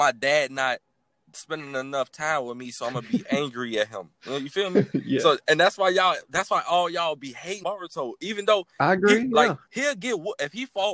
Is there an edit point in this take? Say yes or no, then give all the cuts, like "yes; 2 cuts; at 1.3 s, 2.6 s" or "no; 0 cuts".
yes; 3 cuts; at 4.1 s, 7.6 s, 9.7 s